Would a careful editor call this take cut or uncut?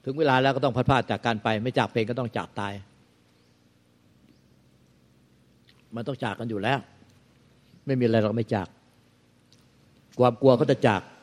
uncut